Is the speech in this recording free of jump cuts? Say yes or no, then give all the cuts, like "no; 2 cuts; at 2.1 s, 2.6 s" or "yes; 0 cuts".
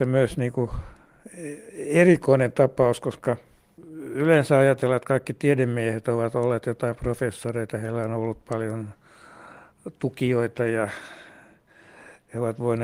yes; 0 cuts